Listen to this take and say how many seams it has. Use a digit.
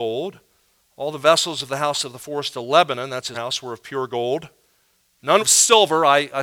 2